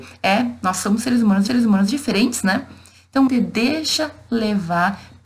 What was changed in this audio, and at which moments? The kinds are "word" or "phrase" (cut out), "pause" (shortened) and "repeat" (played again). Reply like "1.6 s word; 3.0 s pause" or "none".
1.5 s repeat; 3.3 s word